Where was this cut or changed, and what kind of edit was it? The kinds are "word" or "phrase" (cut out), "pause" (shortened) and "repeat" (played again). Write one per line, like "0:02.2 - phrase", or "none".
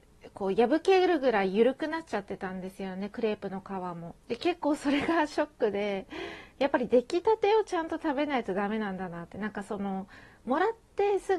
0:04.2 - pause